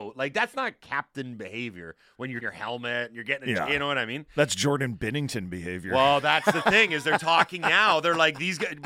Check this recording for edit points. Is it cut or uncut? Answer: cut